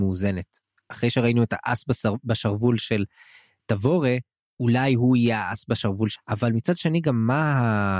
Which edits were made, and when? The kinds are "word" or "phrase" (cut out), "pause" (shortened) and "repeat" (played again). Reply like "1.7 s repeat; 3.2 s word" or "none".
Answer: 6.2 s word